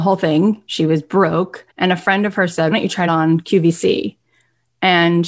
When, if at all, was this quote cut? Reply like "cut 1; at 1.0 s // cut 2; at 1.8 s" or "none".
cut 1; at 1.7 s // cut 2; at 2.7 s // cut 3; at 3.1 s